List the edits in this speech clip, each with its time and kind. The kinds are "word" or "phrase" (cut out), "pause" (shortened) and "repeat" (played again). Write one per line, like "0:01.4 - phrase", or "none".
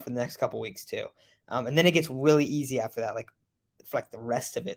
none